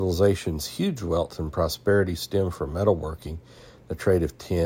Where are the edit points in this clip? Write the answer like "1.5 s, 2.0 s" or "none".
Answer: none